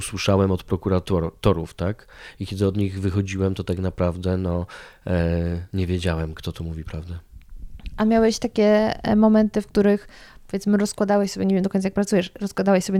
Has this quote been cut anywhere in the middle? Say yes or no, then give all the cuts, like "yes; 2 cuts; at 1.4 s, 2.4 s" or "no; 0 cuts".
no; 0 cuts